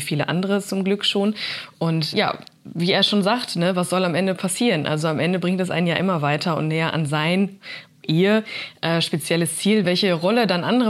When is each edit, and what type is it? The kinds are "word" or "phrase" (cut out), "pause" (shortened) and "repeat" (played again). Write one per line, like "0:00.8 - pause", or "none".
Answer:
0:02.1 - word
0:09.8 - word